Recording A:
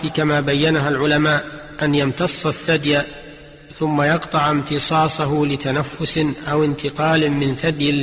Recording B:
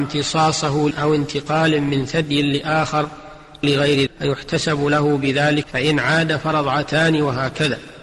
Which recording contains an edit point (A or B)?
B